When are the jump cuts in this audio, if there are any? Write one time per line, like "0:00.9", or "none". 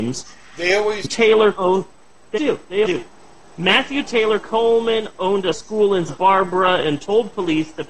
0:01.0
0:01.5
0:02.4
0:02.8
0:05.5
0:06.1